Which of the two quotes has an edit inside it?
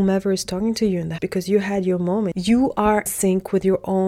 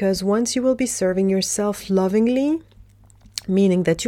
first; 2 cuts; at 1.2 s, 3.1 s

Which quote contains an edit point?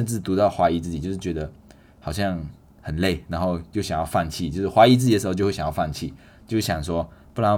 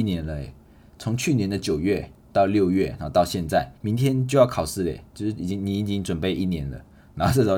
second; 1 cut; at 3.8 s

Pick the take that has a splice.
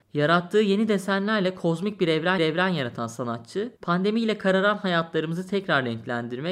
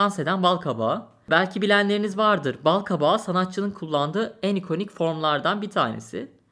first; 2 cuts; at 2.4 s, 3.8 s

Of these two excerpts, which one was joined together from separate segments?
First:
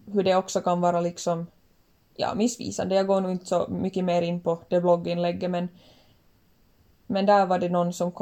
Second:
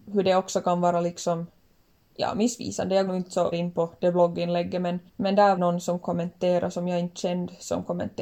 second; 4 cuts; at 3.1 s, 3.5 s, 5.1 s, 5.6 s

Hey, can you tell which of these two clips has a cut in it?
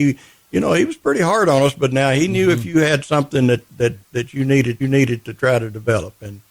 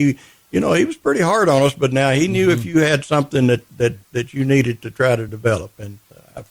first; 1 cut; at 4.8 s

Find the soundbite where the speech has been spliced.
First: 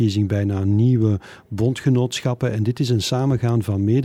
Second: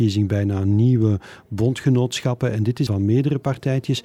second; 1 cut; at 2.9 s

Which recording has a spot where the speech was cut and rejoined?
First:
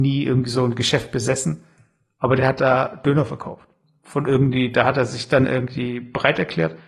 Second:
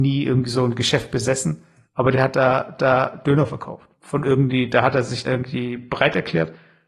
second; 4 cuts; at 1.8 s, 2.8 s, 3.9 s, 5.2 s

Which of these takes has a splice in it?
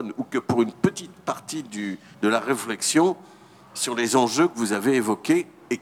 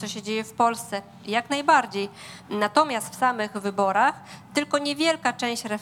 first; 1 cut; at 2.1 s

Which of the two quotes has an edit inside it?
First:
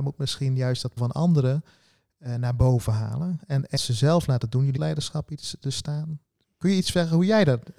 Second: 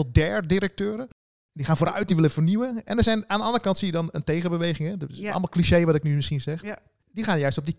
first; 3 cuts; at 1.0 s, 3.8 s, 4.8 s

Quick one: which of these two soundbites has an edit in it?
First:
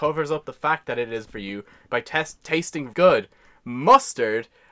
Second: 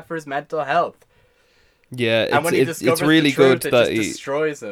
first; 3 cuts; at 1.3 s, 2.4 s, 2.9 s

